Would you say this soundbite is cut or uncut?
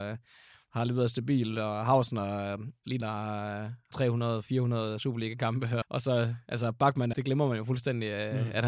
cut